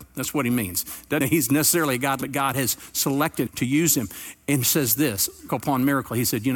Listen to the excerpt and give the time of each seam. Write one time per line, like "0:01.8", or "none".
0:01.2
0:02.2
0:03.5
0:04.6
0:05.5